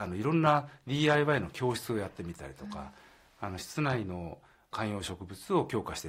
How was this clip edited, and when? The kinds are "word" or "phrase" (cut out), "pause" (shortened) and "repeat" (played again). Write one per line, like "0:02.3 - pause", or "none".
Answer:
none